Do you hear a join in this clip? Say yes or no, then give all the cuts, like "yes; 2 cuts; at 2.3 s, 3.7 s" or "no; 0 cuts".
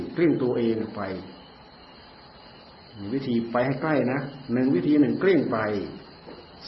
no; 0 cuts